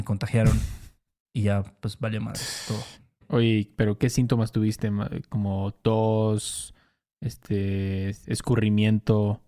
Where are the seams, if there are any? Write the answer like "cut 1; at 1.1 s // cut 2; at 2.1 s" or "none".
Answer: none